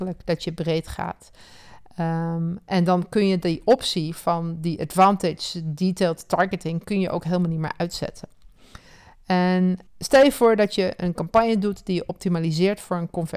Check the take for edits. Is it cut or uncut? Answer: cut